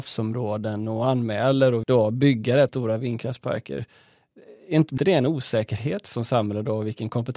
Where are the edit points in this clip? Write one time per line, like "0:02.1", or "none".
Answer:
0:01.8
0:02.7
0:05.0
0:06.1